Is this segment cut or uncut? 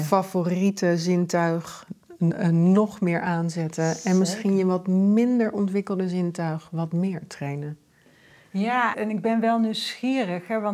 cut